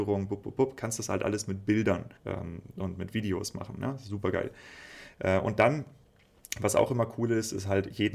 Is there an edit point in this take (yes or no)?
yes